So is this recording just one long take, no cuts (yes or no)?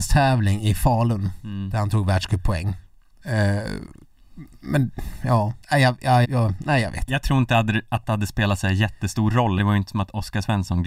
no